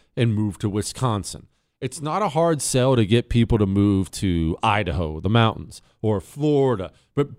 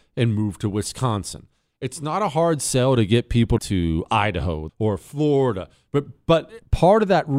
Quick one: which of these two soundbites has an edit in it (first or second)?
second